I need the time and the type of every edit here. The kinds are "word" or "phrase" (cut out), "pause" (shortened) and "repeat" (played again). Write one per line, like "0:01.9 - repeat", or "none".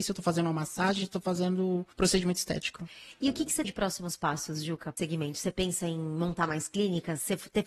0:01.9 - pause
0:03.6 - word
0:05.0 - phrase